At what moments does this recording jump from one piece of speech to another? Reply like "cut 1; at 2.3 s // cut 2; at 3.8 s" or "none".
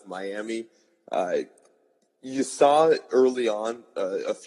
none